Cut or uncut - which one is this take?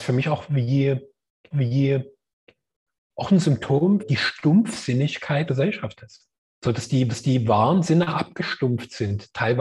cut